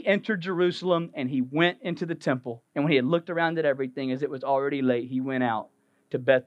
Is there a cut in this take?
yes; 1 cut; at 2.7 s

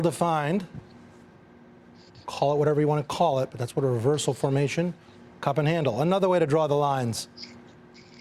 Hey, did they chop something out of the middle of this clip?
no; 0 cuts

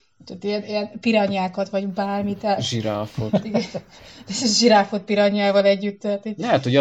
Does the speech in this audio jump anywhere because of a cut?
no; 0 cuts

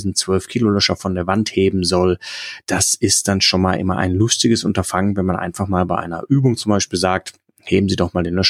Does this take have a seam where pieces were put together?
no; 0 cuts

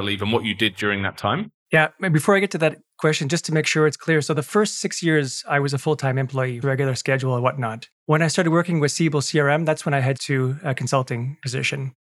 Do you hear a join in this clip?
yes; 3 cuts; at 1.6 s, 6.6 s, 10.2 s

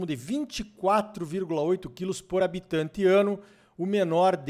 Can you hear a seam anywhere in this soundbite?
no; 0 cuts

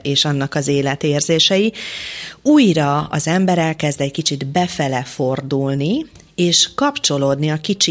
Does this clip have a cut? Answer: no; 0 cuts

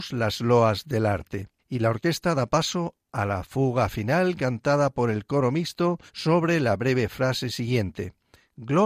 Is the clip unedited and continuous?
no; 2 cuts; at 1.6 s, 6.1 s

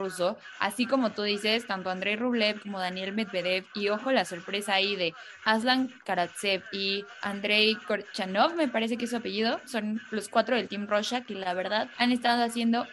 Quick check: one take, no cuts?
yes; 0 cuts

